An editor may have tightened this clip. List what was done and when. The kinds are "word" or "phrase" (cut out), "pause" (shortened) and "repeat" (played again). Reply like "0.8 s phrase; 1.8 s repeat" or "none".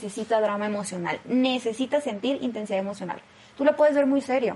none